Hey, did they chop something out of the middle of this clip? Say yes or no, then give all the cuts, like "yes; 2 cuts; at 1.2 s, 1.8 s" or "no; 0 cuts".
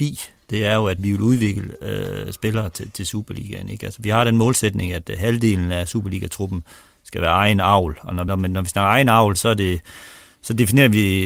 yes; 3 cuts; at 1.0 s, 8.3 s, 9.3 s